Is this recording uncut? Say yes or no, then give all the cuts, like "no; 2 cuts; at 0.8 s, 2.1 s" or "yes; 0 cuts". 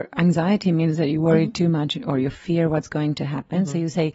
yes; 0 cuts